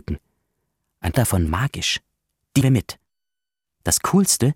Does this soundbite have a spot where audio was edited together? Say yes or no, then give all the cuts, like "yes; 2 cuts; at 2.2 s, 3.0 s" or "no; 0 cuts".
yes; 3 cuts; at 1.1 s, 1.5 s, 2.6 s